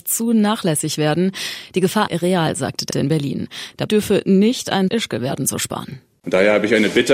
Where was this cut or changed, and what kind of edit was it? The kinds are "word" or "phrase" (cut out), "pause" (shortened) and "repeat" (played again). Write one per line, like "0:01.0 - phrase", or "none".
0:02.1 - phrase
0:02.9 - phrase
0:03.9 - word
0:04.9 - word